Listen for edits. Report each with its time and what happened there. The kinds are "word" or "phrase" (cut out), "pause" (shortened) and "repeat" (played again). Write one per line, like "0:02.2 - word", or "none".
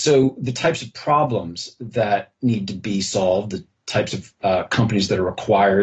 none

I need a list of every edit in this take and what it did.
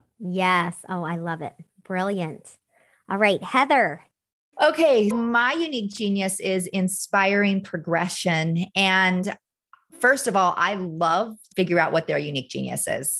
0:05.1 - word
0:11.5 - phrase

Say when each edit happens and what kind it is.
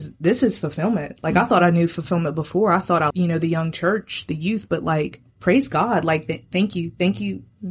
0:03.1 - word
0:05.3 - pause

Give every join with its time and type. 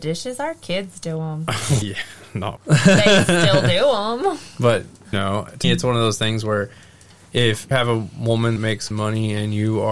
0:01.8 - word
0:02.6 - word
0:05.1 - word
0:05.6 - word
0:07.7 - word
0:08.6 - word
0:08.9 - word

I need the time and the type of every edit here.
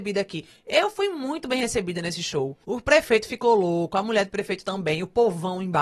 0:02.6 - pause

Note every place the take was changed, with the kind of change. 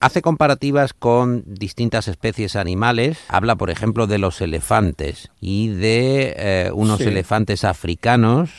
0:03.3 - word

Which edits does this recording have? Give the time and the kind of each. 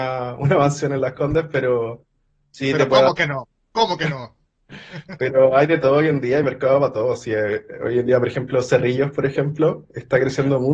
none

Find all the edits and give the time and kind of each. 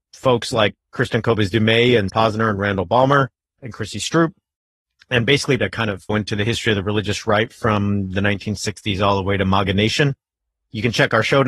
0:02.1 - word
0:03.6 - word
0:05.6 - word
0:06.1 - word

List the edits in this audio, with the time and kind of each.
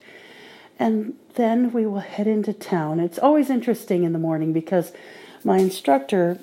none

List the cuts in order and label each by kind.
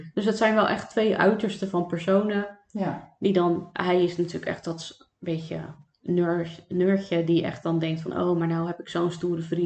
none

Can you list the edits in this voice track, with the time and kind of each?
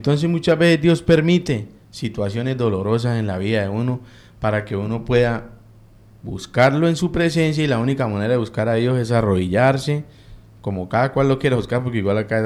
none

